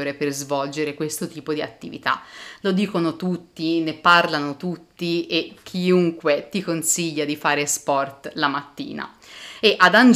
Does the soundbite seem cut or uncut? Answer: uncut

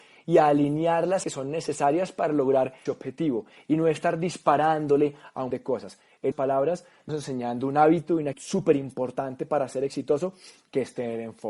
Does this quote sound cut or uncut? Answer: cut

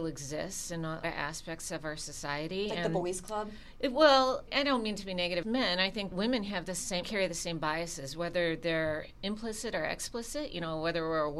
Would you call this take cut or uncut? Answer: cut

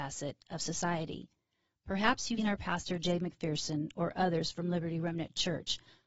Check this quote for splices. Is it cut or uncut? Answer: cut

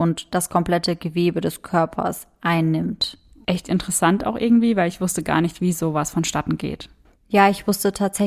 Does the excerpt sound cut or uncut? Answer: uncut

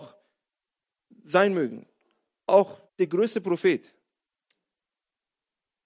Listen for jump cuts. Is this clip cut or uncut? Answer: cut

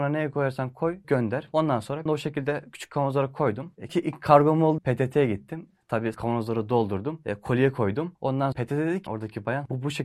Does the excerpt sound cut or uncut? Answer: cut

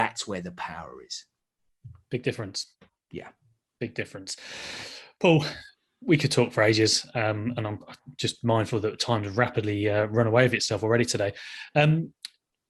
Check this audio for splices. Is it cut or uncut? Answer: uncut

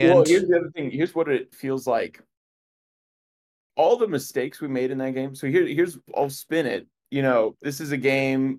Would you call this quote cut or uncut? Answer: cut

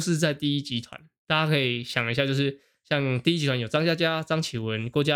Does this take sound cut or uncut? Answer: uncut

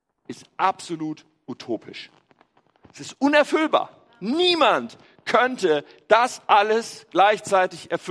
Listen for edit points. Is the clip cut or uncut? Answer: uncut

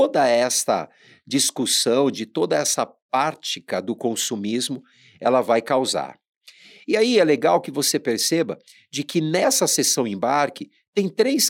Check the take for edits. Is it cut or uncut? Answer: uncut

